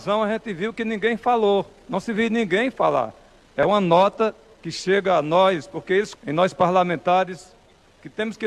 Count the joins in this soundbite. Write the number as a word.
one